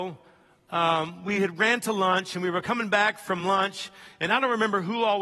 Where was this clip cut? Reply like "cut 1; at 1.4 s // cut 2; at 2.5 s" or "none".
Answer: none